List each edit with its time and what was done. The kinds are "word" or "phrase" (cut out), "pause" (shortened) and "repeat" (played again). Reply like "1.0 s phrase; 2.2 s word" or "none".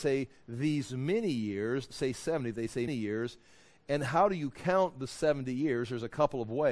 1.9 s word; 2.9 s word